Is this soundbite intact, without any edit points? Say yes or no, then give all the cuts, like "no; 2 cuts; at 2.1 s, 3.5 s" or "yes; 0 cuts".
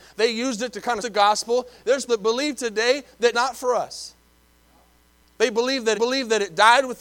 no; 4 cuts; at 1.0 s, 2.1 s, 3.3 s, 5.9 s